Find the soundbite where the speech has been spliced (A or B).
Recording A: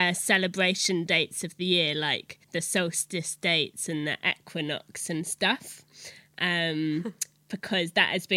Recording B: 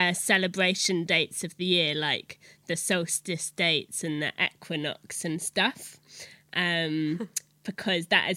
A